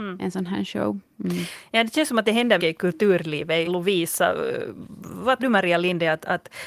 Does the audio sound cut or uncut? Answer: cut